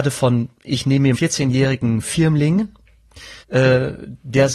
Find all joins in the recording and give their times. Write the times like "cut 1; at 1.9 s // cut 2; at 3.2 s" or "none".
cut 1; at 1.1 s // cut 2; at 3.4 s